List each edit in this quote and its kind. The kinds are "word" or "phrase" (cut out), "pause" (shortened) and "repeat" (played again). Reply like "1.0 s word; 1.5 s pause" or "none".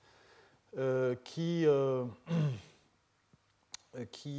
none